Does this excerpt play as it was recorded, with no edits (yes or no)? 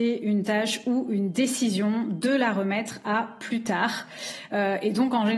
yes